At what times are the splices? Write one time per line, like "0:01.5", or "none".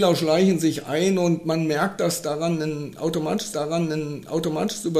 0:03.5